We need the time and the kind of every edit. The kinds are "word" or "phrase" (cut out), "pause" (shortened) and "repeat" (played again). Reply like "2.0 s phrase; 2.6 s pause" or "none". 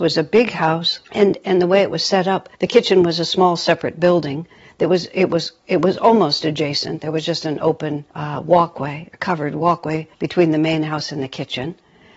1.1 s pause; 2.5 s pause; 8.1 s pause; 10.1 s pause